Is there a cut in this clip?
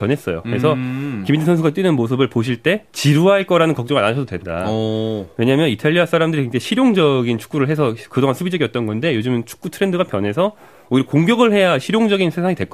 yes; 1 cut; at 2.9 s

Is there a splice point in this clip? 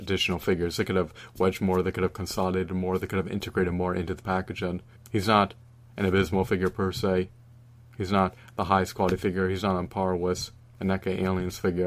yes; 1 cut; at 5.0 s

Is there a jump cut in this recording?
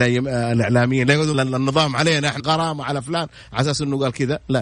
yes; 2 cuts; at 1.3 s, 2.4 s

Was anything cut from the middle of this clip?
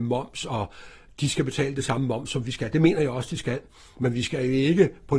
no; 0 cuts

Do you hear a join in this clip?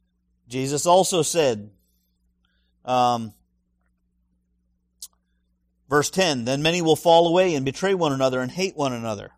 no; 0 cuts

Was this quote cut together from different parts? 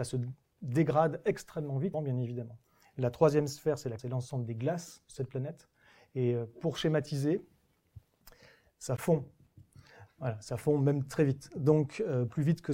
yes; 2 cuts; at 1.9 s, 4.0 s

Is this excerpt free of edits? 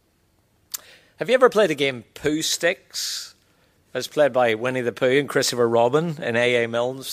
yes; 0 cuts

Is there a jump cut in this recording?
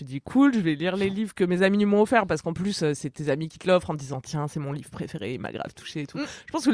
no; 0 cuts

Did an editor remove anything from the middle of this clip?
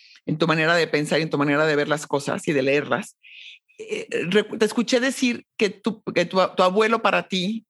no; 0 cuts

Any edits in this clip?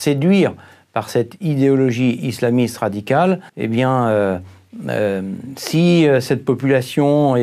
yes; 1 cut; at 3.5 s

